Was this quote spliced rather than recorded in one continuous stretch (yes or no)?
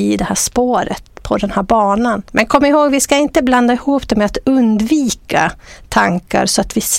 no